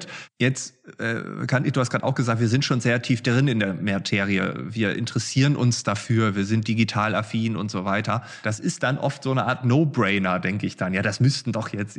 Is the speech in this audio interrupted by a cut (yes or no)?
no